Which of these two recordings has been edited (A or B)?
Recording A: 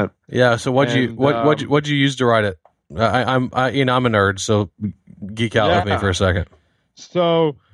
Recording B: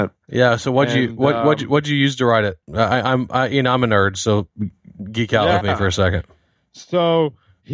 B